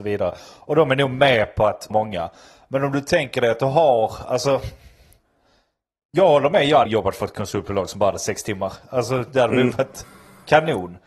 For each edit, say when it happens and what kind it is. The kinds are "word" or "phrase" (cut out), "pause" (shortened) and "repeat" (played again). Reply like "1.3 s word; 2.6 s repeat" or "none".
1.9 s word; 6.9 s word